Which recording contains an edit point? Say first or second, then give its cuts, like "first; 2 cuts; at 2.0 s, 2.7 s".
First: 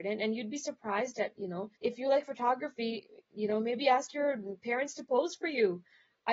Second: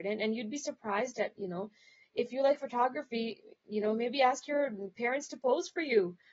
first; 1 cut; at 1.8 s